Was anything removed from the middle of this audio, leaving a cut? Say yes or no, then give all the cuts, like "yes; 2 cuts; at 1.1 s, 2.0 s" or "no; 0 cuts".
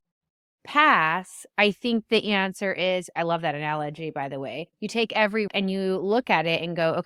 yes; 2 cuts; at 4.7 s, 5.5 s